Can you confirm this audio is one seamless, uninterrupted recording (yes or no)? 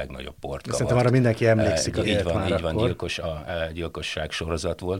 no